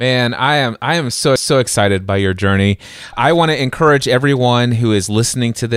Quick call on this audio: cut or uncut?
cut